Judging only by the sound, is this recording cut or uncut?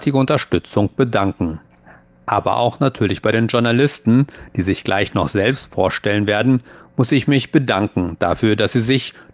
uncut